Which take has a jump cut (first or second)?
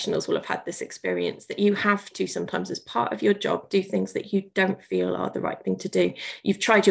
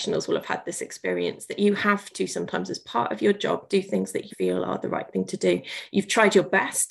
second